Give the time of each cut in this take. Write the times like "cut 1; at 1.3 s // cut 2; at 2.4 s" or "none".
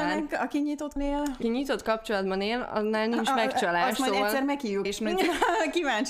cut 1; at 1.0 s // cut 2; at 1.4 s // cut 3; at 4.8 s